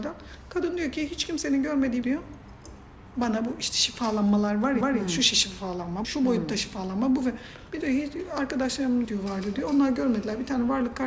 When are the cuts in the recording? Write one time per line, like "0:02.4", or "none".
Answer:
0:02.0
0:04.8
0:06.0
0:07.8
0:09.0